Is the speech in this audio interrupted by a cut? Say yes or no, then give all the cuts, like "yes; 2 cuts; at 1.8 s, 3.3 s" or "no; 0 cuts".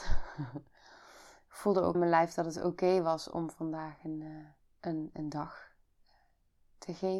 yes; 2 cuts; at 1.9 s, 4.6 s